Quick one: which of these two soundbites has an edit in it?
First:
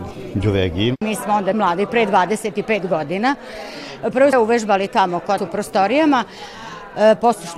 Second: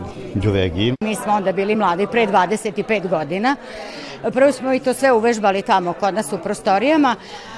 first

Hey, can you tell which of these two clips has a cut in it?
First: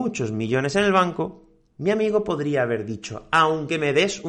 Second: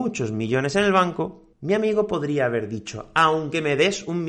second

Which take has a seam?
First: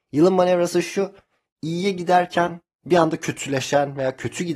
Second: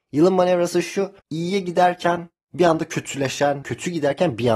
second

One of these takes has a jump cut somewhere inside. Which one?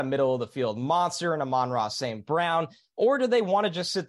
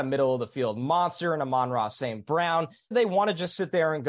second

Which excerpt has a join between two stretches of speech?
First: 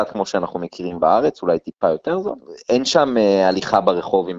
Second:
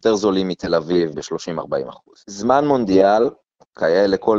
second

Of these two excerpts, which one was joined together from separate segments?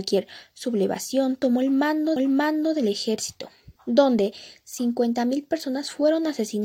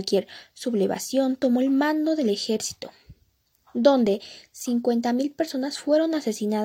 first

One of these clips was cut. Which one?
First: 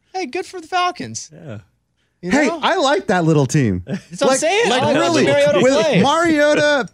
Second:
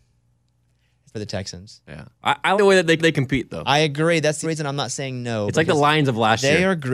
second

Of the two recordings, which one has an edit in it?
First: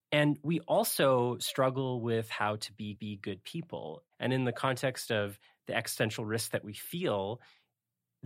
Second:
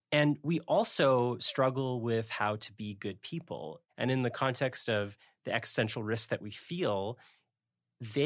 first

